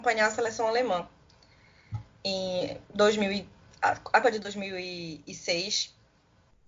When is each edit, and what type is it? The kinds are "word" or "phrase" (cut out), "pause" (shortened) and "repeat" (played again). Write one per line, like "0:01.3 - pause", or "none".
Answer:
0:02.8 - pause
0:03.7 - pause
0:04.2 - word